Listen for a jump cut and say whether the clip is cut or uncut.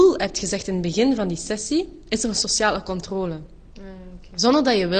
uncut